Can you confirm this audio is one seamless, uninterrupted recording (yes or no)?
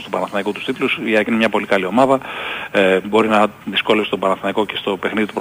yes